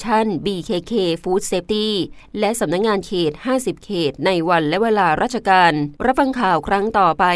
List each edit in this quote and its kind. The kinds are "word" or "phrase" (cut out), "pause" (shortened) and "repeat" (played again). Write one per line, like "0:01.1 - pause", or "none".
0:06.0 - pause